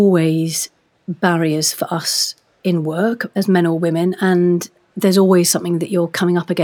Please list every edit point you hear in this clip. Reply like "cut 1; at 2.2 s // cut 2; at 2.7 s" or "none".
none

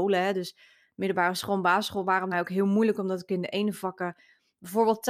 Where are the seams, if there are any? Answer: cut 1; at 2.3 s

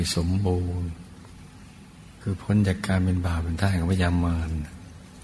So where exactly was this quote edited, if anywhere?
cut 1; at 2.2 s

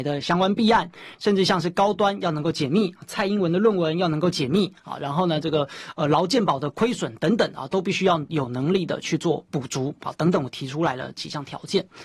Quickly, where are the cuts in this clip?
cut 1; at 1.1 s

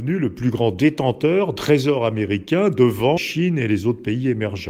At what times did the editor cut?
cut 1; at 1.6 s // cut 2; at 3.2 s

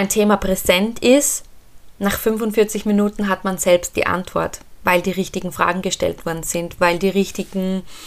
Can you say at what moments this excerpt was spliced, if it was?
none

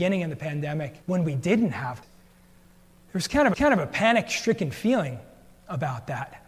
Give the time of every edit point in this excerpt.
cut 1; at 1.0 s // cut 2; at 2.0 s // cut 3; at 3.5 s

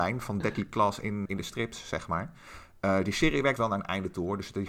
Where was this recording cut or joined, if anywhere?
cut 1; at 1.3 s // cut 2; at 3.6 s

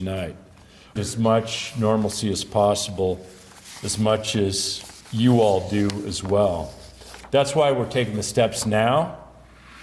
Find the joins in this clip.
cut 1; at 1.0 s // cut 2; at 5.0 s

